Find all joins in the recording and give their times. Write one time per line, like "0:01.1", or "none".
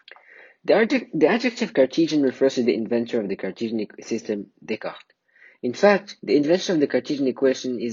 none